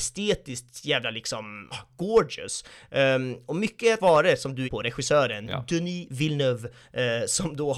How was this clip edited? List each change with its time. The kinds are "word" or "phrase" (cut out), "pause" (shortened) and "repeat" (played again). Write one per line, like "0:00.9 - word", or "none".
0:01.7 - word
0:04.0 - word
0:04.6 - phrase

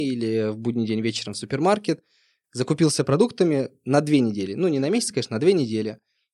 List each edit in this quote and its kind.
none

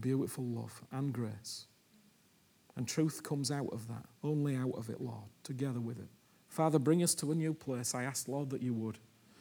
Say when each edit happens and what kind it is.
0:04.1 - pause
0:06.2 - pause

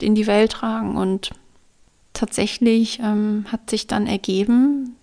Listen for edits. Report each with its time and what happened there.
none

